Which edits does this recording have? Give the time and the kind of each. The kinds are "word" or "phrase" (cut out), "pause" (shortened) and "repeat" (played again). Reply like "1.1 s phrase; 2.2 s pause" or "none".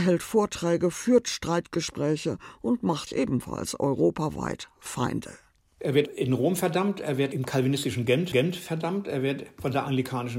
3.1 s word; 8.3 s repeat